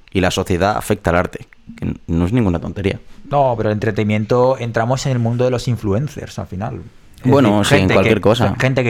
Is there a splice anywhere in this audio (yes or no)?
no